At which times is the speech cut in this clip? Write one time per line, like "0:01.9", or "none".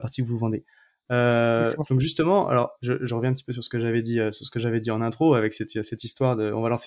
none